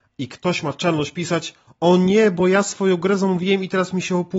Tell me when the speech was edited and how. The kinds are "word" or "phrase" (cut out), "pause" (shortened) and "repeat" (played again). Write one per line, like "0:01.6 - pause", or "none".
none